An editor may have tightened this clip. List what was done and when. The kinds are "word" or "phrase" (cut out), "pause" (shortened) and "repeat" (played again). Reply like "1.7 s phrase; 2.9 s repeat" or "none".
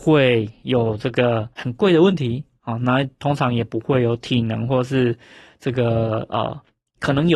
1.5 s pause